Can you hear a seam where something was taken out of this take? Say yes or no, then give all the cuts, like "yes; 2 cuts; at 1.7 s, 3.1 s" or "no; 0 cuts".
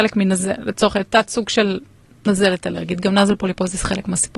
no; 0 cuts